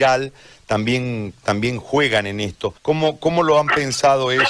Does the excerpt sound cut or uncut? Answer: cut